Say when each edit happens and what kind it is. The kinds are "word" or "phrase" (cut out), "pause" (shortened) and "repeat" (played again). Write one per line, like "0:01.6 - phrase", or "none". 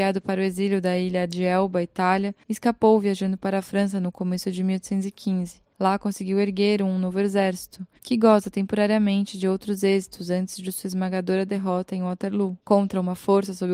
0:08.0 - pause
0:12.6 - pause